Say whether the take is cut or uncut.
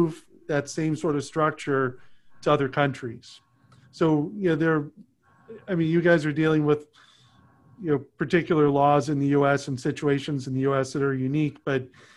uncut